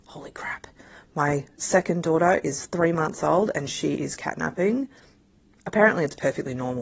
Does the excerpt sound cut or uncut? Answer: uncut